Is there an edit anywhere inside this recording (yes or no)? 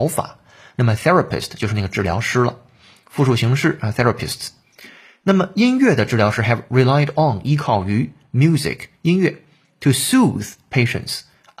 no